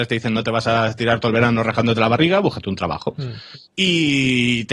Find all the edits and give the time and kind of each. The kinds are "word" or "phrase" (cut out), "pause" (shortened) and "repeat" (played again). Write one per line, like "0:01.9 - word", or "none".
0:03.6 - pause